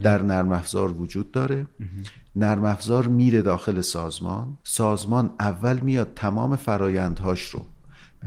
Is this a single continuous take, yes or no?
no